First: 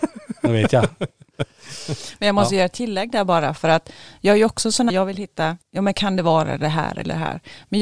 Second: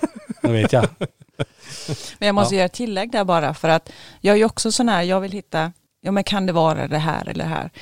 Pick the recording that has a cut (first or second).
first